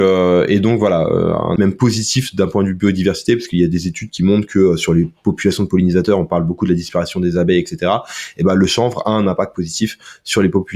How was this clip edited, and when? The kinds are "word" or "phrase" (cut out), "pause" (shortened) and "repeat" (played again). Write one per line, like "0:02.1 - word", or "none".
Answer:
0:01.6 - word